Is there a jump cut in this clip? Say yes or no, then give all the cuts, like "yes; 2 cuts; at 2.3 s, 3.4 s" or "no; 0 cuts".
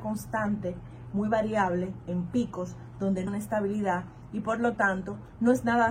yes; 1 cut; at 3.3 s